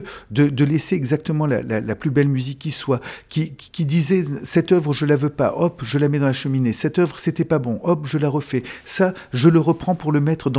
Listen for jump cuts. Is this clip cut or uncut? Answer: uncut